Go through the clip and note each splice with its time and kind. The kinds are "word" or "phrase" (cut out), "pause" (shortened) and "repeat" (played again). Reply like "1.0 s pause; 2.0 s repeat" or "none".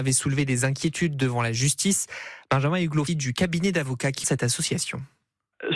3.1 s phrase; 4.2 s word